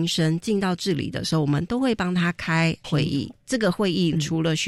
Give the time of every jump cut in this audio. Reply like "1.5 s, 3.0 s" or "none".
2.8 s